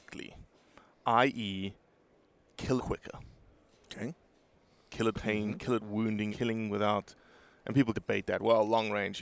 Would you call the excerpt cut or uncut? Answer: cut